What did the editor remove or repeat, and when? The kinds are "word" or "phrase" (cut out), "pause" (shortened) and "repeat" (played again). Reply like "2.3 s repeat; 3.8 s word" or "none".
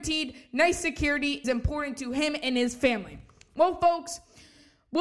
1.4 s word